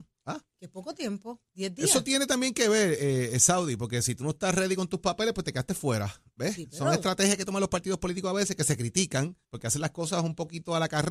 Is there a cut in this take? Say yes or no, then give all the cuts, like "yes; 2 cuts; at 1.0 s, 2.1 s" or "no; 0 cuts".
yes; 2 cuts; at 1.5 s, 9.4 s